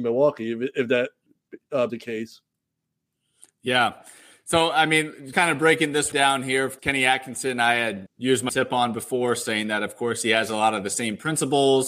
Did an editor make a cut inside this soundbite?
yes; 6 cuts; at 1.9 s, 5.3 s, 6.1 s, 6.8 s, 8.1 s, 8.5 s

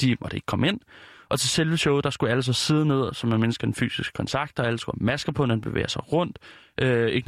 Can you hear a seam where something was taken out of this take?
no; 0 cuts

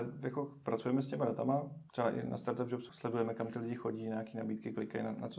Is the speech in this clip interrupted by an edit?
yes; 2 cuts; at 1.9 s, 2.9 s

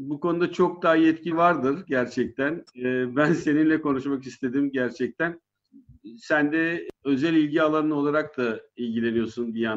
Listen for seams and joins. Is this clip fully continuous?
no; 3 cuts; at 1.3 s, 2.7 s, 7.0 s

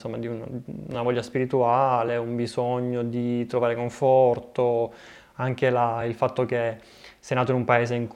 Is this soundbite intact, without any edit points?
yes; 0 cuts

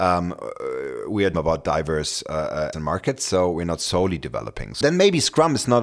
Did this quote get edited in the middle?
yes; 3 cuts; at 1.3 s, 2.7 s, 4.8 s

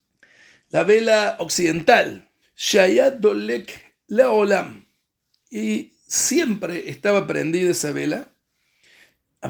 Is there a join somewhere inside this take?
yes; 1 cut; at 2.4 s

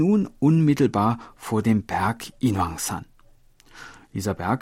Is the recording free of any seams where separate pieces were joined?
yes; 0 cuts

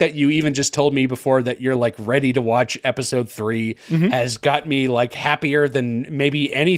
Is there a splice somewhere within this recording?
no; 0 cuts

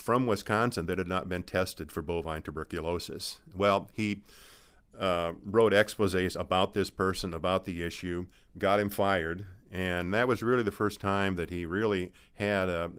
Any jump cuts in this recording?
no; 0 cuts

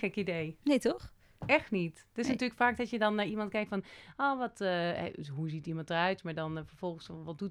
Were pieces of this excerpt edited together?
no; 0 cuts

